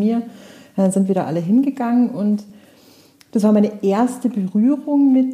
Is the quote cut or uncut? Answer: uncut